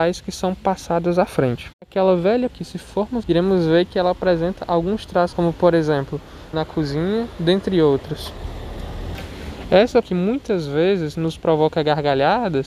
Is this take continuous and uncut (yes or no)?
no